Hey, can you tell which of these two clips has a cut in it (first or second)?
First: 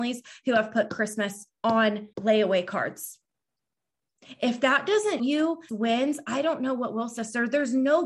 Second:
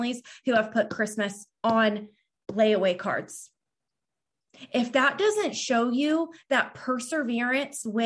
first